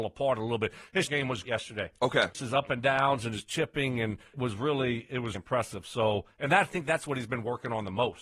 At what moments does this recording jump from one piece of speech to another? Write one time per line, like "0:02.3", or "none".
0:01.1
0:01.4
0:02.3
0:04.3
0:05.3